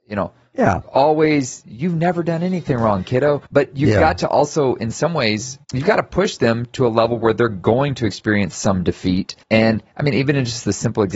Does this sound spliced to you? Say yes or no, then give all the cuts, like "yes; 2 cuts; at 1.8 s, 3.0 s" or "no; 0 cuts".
yes; 3 cuts; at 3.4 s, 5.6 s, 9.4 s